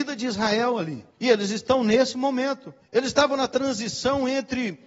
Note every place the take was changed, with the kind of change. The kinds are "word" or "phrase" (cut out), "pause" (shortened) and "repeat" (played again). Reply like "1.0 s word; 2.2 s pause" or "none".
1.1 s pause; 2.8 s pause